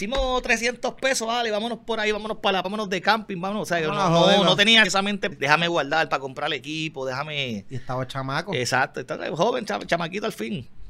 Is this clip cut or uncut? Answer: cut